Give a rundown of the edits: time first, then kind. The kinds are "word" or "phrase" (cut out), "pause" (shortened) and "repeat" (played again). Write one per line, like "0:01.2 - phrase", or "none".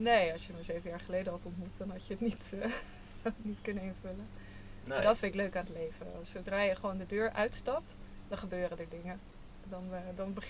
none